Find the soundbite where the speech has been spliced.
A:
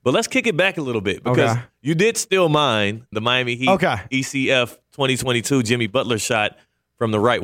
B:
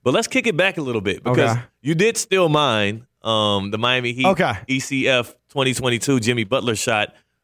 A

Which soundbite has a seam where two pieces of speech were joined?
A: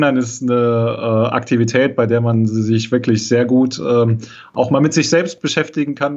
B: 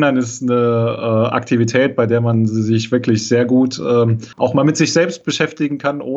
B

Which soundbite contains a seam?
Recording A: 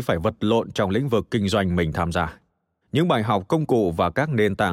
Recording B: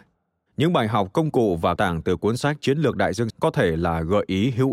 B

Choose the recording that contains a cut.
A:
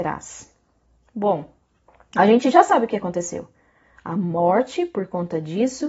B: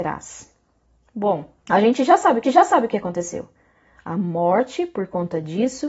B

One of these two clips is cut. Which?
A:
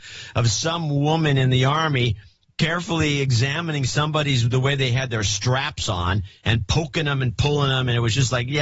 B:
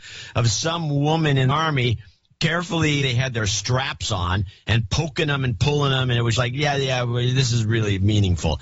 B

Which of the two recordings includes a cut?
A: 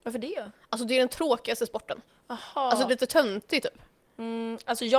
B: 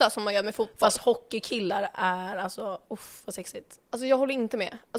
A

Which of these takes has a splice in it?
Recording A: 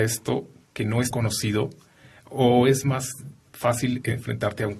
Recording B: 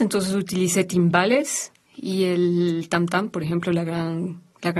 A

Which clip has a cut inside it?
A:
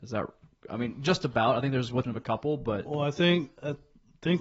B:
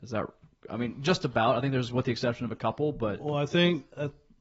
A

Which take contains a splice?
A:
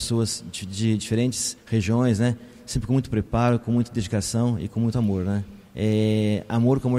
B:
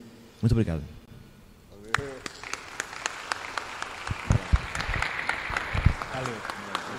A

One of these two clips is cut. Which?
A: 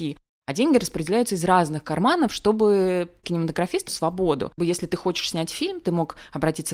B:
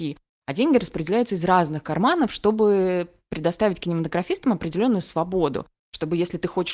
A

